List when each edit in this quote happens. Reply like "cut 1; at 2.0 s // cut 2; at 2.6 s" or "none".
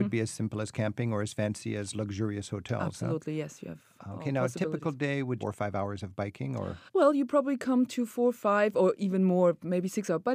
cut 1; at 5.4 s